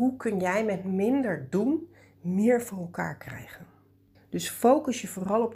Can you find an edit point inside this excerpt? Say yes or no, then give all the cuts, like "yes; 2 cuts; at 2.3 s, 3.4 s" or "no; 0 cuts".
no; 0 cuts